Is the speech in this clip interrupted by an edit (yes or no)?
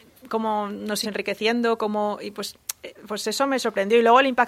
yes